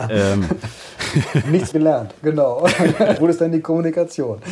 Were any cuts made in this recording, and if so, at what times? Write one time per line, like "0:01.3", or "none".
0:01.7
0:03.2